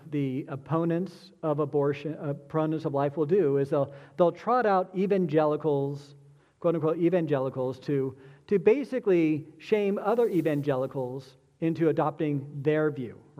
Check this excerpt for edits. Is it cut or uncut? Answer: uncut